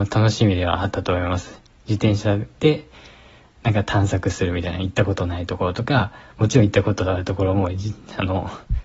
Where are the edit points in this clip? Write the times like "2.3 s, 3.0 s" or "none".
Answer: none